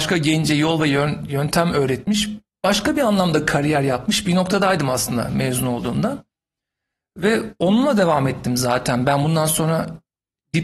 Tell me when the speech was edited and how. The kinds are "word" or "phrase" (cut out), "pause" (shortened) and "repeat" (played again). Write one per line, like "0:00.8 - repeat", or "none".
none